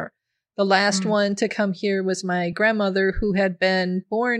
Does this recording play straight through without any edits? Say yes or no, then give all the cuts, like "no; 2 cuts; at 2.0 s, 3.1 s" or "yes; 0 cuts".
yes; 0 cuts